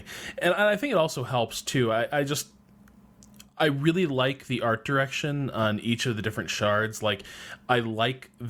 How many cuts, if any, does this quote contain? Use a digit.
0